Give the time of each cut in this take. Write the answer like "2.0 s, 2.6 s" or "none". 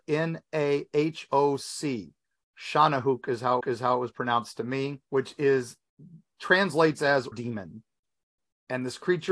1.3 s, 3.6 s, 5.1 s, 7.3 s